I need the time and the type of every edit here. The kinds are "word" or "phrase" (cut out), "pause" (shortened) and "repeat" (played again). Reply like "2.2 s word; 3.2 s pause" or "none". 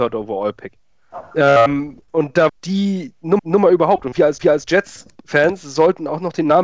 2.0 s pause; 2.5 s word; 3.4 s repeat; 4.4 s repeat